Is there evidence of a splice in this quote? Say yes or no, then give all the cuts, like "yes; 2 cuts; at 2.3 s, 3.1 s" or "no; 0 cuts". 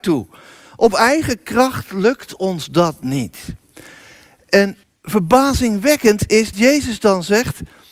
yes; 2 cuts; at 4.8 s, 6.5 s